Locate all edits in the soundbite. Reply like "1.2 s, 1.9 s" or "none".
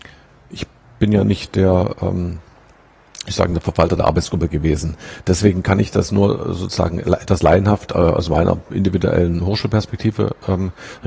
none